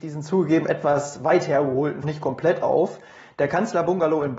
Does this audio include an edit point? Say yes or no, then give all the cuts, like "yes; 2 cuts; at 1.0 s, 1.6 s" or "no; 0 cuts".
yes; 1 cut; at 2.0 s